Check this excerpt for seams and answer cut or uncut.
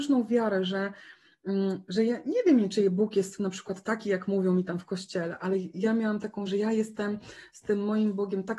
cut